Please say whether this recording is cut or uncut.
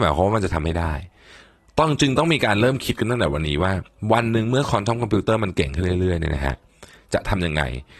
uncut